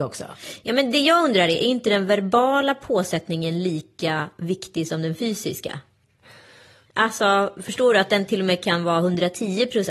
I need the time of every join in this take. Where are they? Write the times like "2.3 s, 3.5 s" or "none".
none